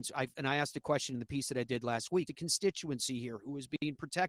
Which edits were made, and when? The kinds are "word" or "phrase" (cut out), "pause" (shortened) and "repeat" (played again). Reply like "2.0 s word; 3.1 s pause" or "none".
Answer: 2.3 s word